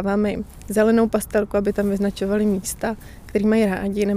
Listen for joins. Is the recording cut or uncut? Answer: uncut